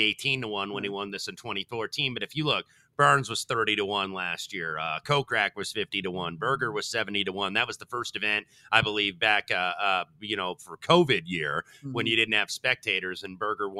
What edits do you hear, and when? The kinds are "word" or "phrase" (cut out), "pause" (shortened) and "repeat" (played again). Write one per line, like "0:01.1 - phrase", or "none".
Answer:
none

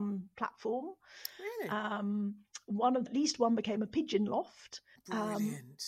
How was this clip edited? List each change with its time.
0:03.1 - word
0:05.0 - pause

